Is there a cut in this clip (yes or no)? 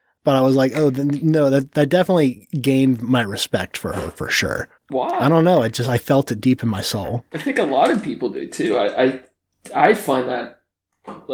yes